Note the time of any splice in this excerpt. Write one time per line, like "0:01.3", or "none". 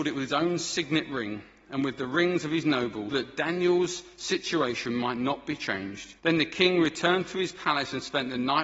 0:03.1
0:06.2